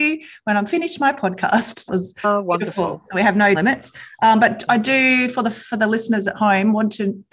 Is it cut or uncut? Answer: cut